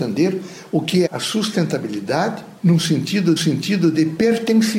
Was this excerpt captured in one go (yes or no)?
no